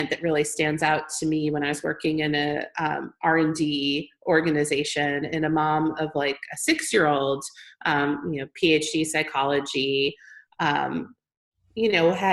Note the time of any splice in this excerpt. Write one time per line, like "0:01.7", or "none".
none